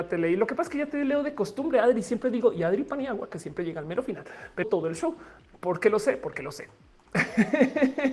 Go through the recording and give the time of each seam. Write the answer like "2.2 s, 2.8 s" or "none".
4.6 s